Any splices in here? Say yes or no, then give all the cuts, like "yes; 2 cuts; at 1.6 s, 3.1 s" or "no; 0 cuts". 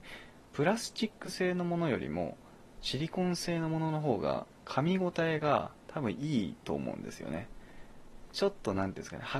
no; 0 cuts